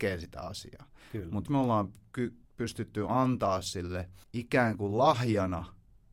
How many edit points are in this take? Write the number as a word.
three